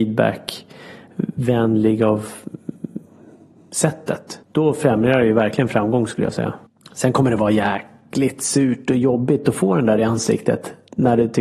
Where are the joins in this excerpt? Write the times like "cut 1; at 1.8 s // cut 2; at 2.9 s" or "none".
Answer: cut 1; at 4.4 s // cut 2; at 6.7 s

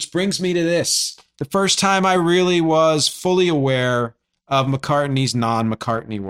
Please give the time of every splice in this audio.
none

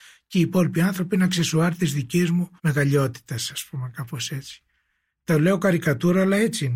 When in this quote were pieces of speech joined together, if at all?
cut 1; at 2.6 s

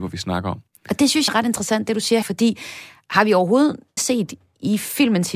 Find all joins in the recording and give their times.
cut 1; at 1.3 s // cut 2; at 2.2 s // cut 3; at 4.0 s

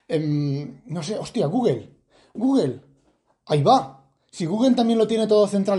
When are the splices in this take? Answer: none

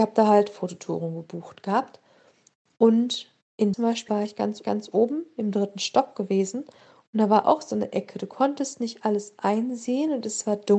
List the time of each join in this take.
cut 1; at 3.7 s // cut 2; at 4.1 s // cut 3; at 4.6 s

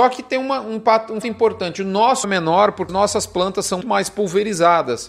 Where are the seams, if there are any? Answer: cut 1; at 1.2 s // cut 2; at 2.2 s // cut 3; at 2.9 s // cut 4; at 3.8 s

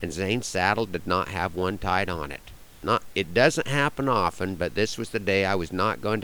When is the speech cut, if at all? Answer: none

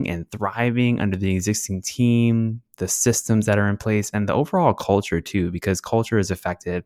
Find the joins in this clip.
none

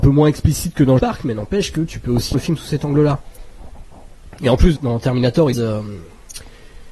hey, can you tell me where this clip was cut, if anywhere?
cut 1; at 1.0 s // cut 2; at 2.3 s // cut 3; at 4.8 s // cut 4; at 5.5 s

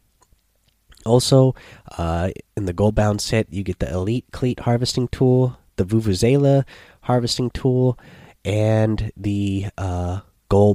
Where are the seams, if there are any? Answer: none

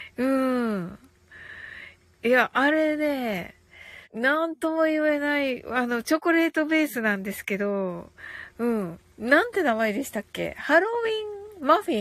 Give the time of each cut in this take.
cut 1; at 4.0 s

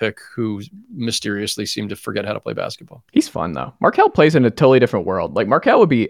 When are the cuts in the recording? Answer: cut 1; at 3.1 s

